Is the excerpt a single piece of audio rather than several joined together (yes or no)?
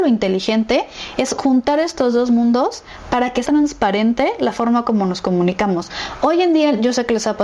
no